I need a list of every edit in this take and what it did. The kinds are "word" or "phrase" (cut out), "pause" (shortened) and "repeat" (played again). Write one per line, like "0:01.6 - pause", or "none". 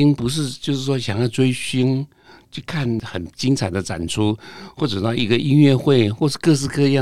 none